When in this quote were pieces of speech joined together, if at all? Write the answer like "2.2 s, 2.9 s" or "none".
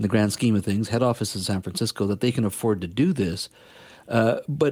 none